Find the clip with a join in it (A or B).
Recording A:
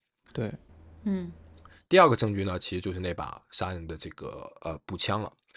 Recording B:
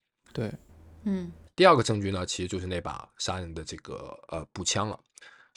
B